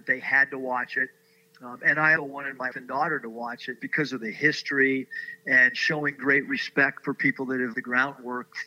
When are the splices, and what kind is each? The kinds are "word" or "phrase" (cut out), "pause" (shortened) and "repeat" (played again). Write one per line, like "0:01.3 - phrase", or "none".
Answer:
0:02.2 - word
0:02.7 - word
0:03.8 - word
0:07.7 - word